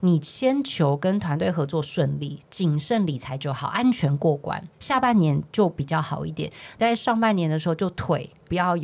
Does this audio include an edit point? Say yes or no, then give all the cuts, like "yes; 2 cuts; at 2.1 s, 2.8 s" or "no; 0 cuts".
yes; 1 cut; at 4.7 s